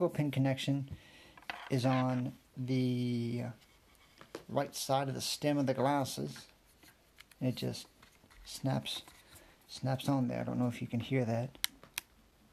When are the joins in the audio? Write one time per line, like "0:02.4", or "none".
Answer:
none